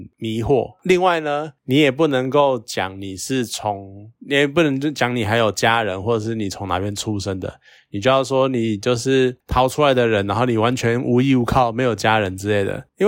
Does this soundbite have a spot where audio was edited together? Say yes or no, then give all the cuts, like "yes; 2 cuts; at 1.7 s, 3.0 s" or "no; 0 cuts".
yes; 1 cut; at 4.2 s